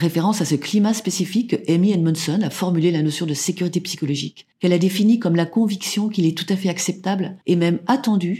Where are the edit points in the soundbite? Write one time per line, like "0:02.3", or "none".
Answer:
0:04.5
0:07.4